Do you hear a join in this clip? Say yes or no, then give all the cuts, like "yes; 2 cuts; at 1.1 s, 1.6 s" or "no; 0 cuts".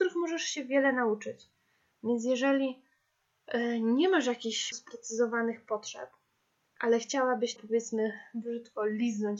yes; 2 cuts; at 4.7 s, 7.6 s